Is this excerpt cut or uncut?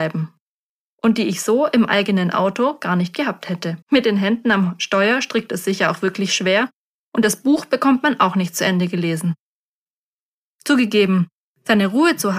cut